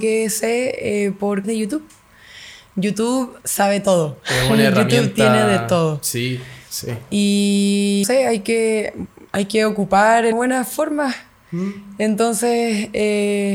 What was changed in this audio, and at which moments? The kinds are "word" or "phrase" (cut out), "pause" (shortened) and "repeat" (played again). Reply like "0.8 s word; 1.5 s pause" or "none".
1.4 s word; 3.4 s pause; 8.0 s word; 9.3 s pause; 10.3 s phrase